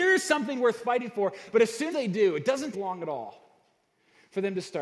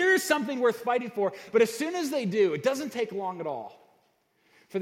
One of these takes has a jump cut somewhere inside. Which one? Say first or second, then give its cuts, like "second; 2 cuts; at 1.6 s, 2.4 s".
first; 2 cuts; at 1.9 s, 2.7 s